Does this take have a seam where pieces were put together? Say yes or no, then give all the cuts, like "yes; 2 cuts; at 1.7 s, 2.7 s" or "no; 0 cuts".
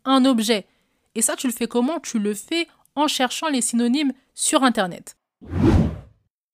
no; 0 cuts